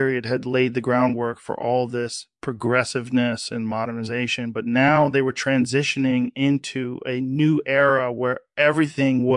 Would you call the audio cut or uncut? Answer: uncut